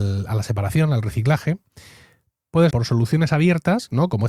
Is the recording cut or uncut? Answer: cut